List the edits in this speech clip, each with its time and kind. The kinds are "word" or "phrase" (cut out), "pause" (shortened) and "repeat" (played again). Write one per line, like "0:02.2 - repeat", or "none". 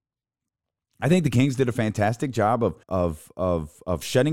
0:02.8 - pause